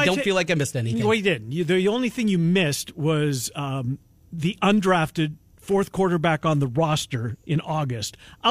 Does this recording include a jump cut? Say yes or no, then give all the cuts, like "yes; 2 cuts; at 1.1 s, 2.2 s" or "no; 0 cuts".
no; 0 cuts